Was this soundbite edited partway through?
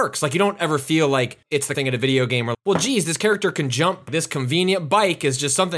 yes; 4 cuts; at 1.4 s, 1.7 s, 2.5 s, 4.1 s

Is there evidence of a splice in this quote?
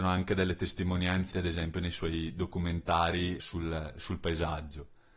yes; 2 cuts; at 1.3 s, 3.4 s

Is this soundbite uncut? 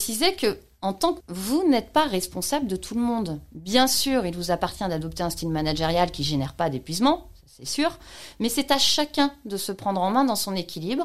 no; 1 cut; at 1.2 s

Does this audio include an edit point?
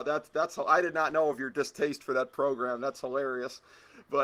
no; 0 cuts

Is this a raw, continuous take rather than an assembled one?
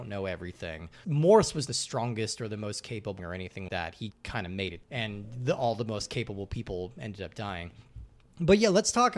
no; 6 cuts; at 1.0 s, 1.7 s, 3.2 s, 3.7 s, 4.1 s, 4.8 s

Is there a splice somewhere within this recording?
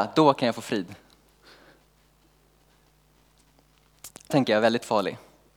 yes; 1 cut; at 4.3 s

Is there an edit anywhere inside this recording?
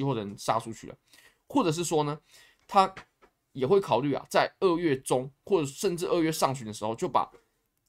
no; 0 cuts

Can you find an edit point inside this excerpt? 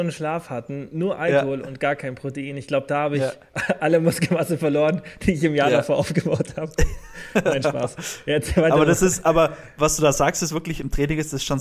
no; 0 cuts

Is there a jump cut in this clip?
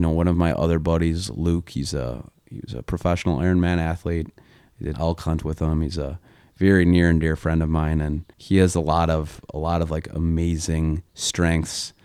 yes; 3 cuts; at 4.9 s, 8.3 s, 11.1 s

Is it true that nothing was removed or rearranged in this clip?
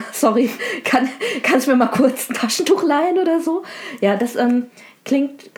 yes; 0 cuts

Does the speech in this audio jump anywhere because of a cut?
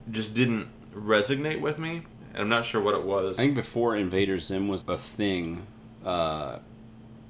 yes; 1 cut; at 4.8 s

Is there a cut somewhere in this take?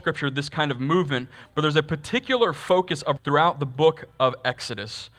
yes; 1 cut; at 3.2 s

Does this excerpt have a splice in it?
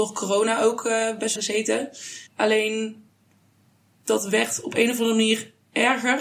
yes; 2 cuts; at 1.4 s, 2.3 s

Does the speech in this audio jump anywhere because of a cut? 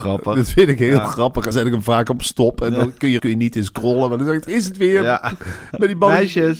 yes; 2 cuts; at 1.5 s, 3.2 s

